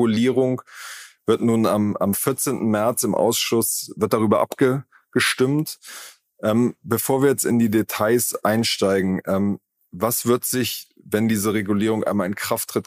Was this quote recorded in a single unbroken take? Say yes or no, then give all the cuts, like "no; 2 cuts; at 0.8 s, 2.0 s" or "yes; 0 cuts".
yes; 0 cuts